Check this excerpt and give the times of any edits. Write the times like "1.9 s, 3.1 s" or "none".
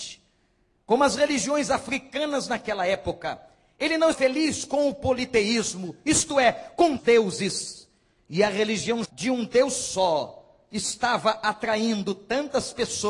4.1 s, 7.0 s, 9.0 s